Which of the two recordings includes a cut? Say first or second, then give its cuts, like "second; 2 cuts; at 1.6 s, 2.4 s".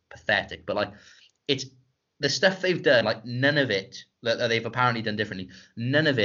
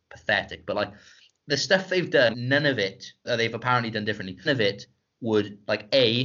second; 4 cuts; at 1.4 s, 2.3 s, 3.2 s, 4.5 s